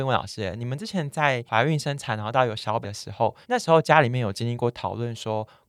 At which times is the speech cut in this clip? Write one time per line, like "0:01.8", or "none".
0:02.8
0:03.4

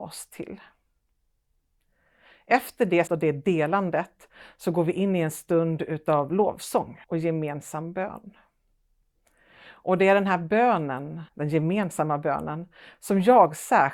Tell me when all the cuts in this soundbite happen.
0:03.1
0:07.0
0:11.3

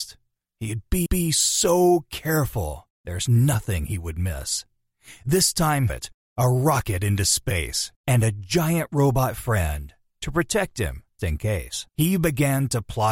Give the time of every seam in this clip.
0:01.1
0:02.9
0:05.9
0:08.0
0:11.2
0:11.9

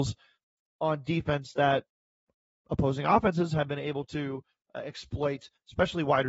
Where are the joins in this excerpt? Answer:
none

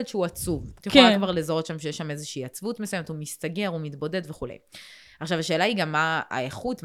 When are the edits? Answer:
none

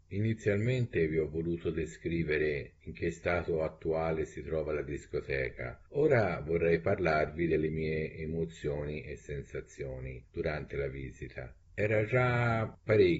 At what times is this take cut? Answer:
0:05.9
0:10.3
0:11.6

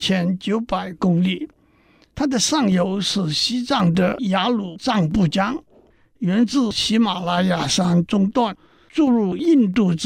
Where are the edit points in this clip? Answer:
none

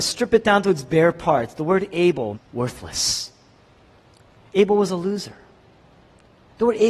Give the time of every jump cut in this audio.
0:02.3

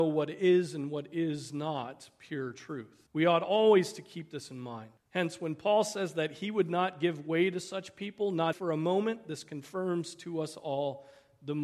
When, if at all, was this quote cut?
0:03.1
0:05.0
0:08.5

